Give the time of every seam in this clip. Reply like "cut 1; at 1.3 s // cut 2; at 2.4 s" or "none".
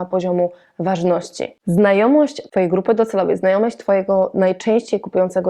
none